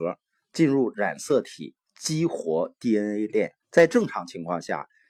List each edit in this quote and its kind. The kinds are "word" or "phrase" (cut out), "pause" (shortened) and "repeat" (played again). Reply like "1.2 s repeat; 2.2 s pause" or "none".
3.6 s pause